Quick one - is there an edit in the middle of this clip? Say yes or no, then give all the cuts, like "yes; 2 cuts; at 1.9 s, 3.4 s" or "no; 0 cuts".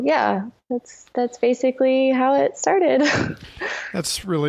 no; 0 cuts